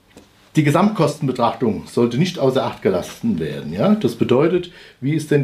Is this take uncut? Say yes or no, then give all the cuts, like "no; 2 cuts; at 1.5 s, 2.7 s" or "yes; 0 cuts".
yes; 0 cuts